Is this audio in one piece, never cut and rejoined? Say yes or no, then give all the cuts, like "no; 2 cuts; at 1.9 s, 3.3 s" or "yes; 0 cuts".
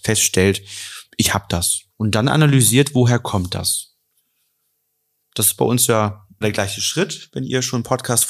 no; 3 cuts; at 1.1 s, 1.9 s, 6.4 s